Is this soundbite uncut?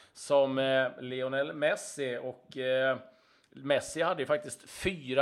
yes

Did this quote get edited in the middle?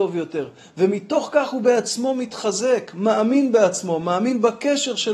no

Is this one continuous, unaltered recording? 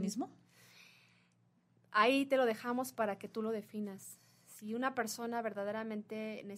yes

